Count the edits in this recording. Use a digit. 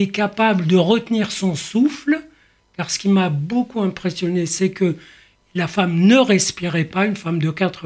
0